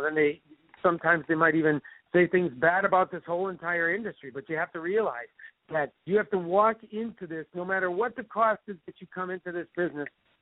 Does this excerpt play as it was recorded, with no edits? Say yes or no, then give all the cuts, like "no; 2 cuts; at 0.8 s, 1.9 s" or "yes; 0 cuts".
no; 1 cut; at 6.0 s